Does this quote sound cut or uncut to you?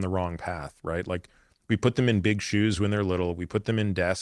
uncut